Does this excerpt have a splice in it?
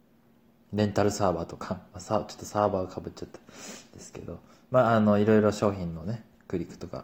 no; 0 cuts

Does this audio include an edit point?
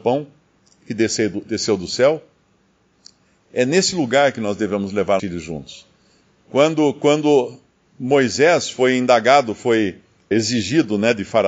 yes; 2 cuts; at 5.2 s, 10.3 s

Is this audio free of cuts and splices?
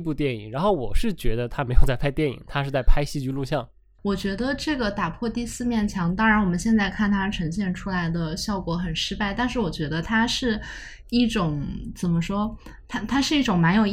yes; 0 cuts

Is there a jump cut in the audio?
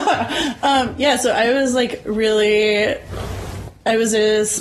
no; 0 cuts

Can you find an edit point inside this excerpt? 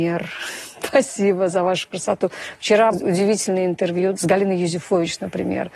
yes; 2 cuts; at 2.9 s, 4.1 s

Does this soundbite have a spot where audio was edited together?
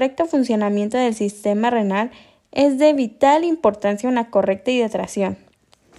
no; 0 cuts

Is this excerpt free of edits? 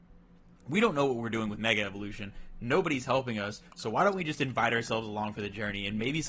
yes; 0 cuts

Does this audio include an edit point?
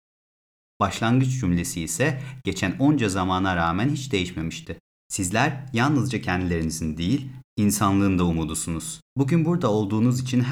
yes; 2 cuts; at 5.0 s, 9.1 s

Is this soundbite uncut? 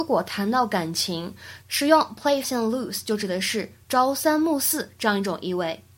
no; 1 cut; at 2.4 s

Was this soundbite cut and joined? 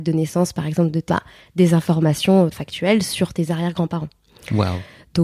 yes; 2 cuts; at 1.1 s, 2.5 s

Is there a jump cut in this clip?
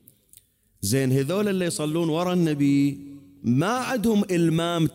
no; 0 cuts

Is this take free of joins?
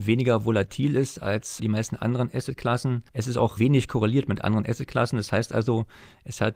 no; 3 cuts; at 1.6 s, 3.1 s, 3.6 s

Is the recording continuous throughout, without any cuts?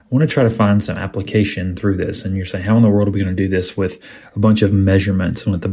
yes; 0 cuts

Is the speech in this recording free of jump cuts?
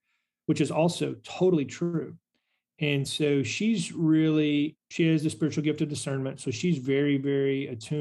yes; 0 cuts

